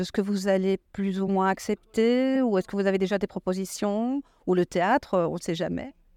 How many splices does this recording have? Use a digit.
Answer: 0